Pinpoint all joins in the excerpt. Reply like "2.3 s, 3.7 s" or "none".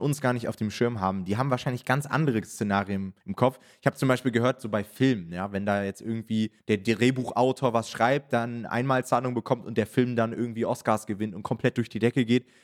3.2 s, 6.6 s